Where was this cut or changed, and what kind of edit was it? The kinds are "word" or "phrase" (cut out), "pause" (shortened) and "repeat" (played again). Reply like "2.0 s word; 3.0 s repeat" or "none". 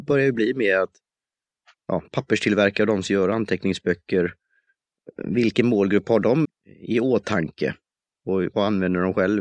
6.4 s word